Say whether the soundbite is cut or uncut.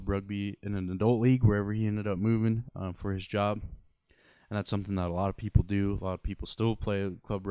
uncut